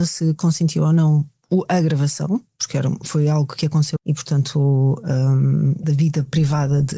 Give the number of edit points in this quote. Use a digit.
2